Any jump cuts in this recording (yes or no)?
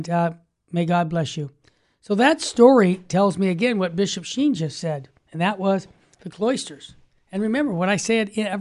no